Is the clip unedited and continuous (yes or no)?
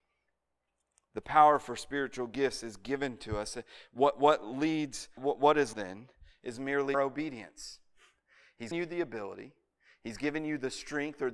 no